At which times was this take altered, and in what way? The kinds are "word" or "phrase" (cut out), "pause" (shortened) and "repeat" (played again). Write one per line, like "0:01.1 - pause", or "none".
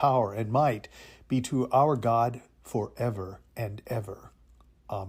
0:03.5 - pause